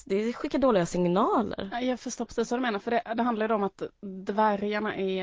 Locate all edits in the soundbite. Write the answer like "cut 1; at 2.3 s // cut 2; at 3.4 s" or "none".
none